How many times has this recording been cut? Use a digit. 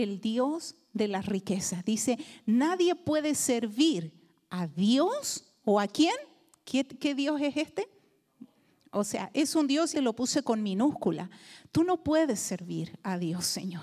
1